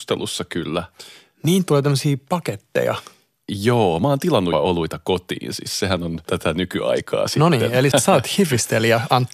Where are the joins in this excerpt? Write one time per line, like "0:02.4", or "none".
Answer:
0:01.6
0:04.5
0:07.9